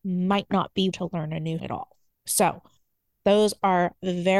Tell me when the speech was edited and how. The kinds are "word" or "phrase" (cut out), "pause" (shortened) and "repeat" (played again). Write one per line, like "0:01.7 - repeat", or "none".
0:00.9 - word
0:01.6 - word

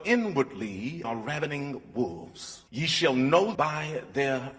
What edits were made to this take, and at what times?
0:01.0 - word
0:02.7 - pause
0:03.5 - word

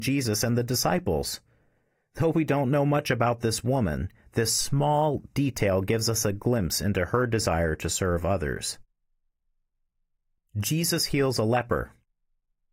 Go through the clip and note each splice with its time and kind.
none

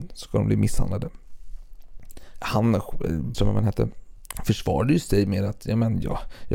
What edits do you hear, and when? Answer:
0:03.3 - phrase

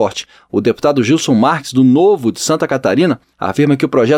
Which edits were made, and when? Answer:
none

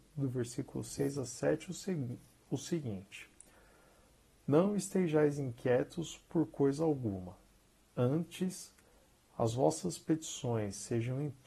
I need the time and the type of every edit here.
none

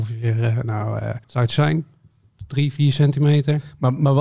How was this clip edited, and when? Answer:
0:01.2 - pause

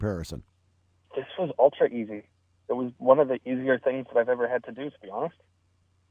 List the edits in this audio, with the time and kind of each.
none

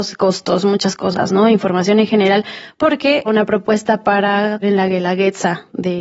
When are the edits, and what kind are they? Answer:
0:03.3 - word
0:04.6 - word

